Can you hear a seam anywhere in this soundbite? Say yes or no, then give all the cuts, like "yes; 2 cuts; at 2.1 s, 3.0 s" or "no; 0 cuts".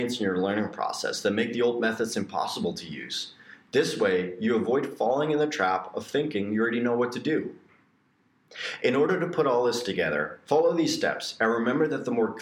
no; 0 cuts